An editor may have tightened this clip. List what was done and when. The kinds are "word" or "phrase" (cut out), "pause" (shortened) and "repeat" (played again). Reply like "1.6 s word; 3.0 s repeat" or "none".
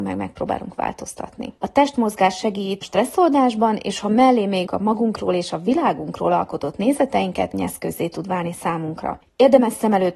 1.6 s pause; 2.8 s word; 4.7 s word; 7.5 s phrase

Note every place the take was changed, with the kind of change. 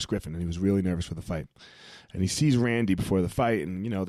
none

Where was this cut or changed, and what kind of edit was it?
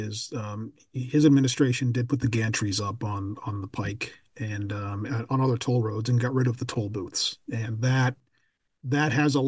none

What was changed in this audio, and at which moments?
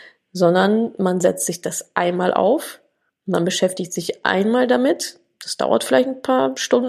none

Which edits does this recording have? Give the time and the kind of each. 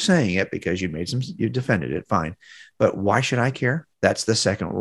3.9 s pause

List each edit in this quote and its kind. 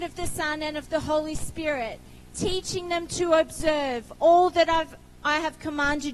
none

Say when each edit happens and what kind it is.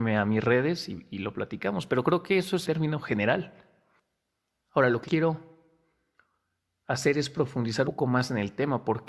2.7 s word; 5.1 s word; 7.8 s word

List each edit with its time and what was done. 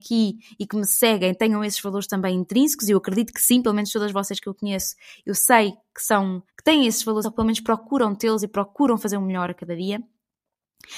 6.5 s pause; 7.2 s word

